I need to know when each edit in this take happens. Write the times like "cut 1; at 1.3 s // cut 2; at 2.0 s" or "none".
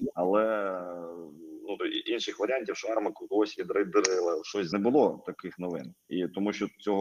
cut 1; at 1.8 s // cut 2; at 4.7 s